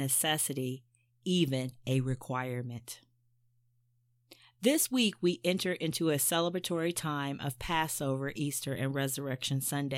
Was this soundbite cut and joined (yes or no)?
no